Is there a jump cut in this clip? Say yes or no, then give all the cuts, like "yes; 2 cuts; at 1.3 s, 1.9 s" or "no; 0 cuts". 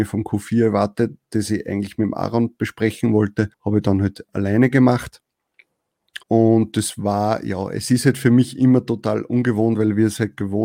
yes; 2 cuts; at 3.5 s, 6.2 s